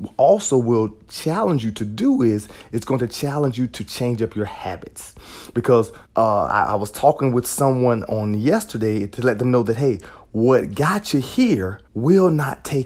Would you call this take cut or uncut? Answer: cut